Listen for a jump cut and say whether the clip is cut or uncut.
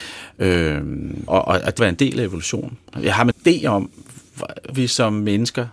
cut